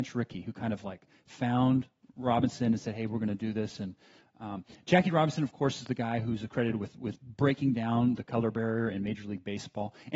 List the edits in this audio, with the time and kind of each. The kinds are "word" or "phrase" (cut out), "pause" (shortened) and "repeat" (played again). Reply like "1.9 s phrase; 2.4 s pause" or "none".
none